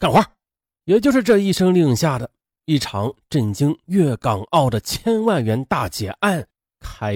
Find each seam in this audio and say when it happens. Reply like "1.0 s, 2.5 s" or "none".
none

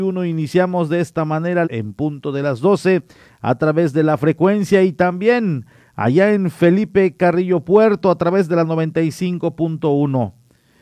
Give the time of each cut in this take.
1.6 s

